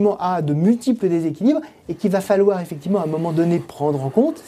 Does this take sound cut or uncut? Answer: uncut